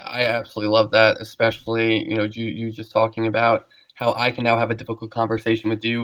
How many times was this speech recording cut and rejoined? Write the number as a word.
zero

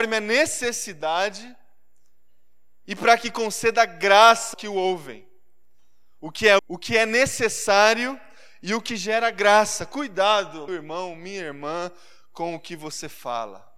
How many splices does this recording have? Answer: three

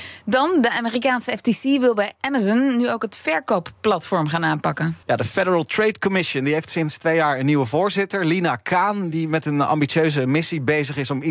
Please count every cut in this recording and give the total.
one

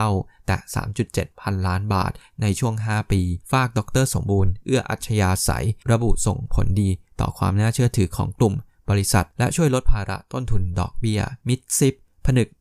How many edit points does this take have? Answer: four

